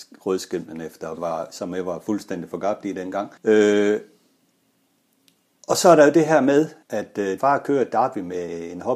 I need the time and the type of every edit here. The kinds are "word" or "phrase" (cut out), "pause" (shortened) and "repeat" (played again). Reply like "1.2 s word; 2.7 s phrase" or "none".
1.2 s phrase; 3.4 s pause; 6.8 s pause; 7.4 s word